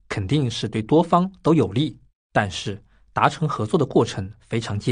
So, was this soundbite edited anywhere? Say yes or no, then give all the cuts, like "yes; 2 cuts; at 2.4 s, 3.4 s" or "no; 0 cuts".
yes; 1 cut; at 2.1 s